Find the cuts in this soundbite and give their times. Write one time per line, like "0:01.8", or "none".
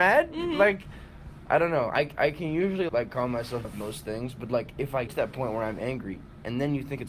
0:02.9
0:03.6
0:05.1